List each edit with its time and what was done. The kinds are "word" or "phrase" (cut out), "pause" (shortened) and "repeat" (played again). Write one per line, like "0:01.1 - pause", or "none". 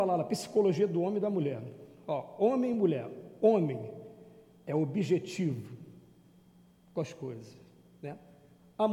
none